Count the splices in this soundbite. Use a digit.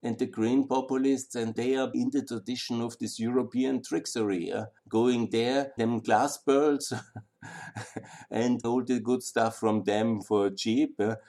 6